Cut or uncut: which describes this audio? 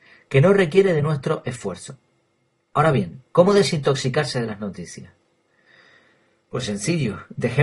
uncut